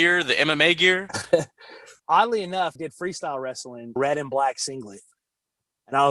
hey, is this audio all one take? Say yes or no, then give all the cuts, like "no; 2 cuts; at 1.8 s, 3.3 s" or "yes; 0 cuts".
no; 3 cuts; at 2.0 s, 2.8 s, 4.0 s